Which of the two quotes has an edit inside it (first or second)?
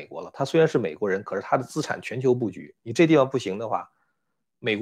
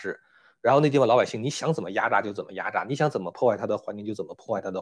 first